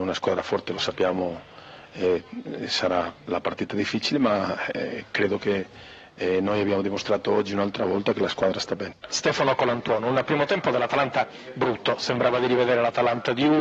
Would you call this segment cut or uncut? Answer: uncut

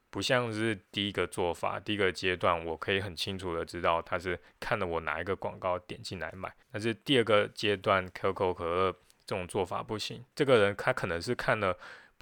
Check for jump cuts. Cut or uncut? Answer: cut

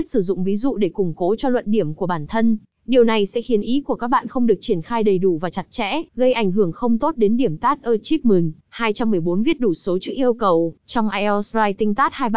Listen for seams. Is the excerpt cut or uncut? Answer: cut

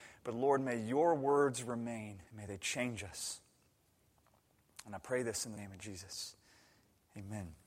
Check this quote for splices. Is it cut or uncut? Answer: cut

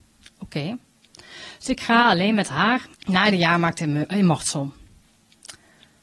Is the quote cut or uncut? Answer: cut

